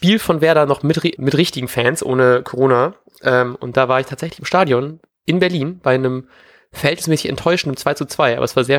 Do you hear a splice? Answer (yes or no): yes